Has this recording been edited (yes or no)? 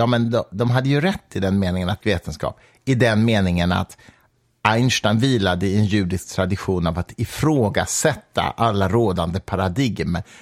yes